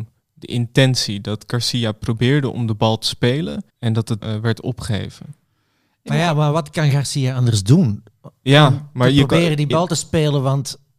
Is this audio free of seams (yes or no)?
no